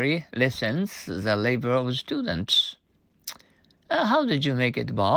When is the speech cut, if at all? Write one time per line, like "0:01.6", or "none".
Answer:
none

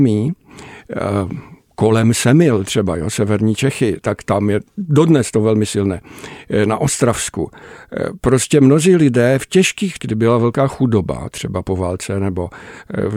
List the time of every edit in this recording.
0:10.0

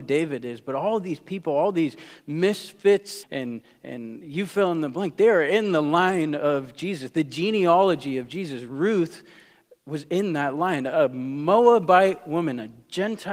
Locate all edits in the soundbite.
0:03.2

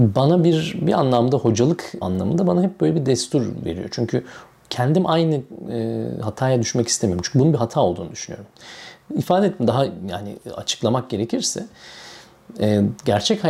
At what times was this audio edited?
0:02.0

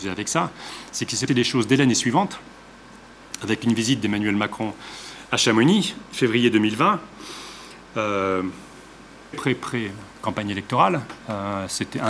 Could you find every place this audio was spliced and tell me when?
0:01.3
0:09.3

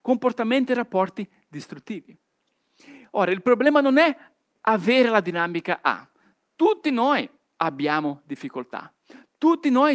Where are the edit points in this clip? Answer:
none

